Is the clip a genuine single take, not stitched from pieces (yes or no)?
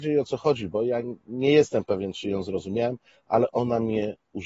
yes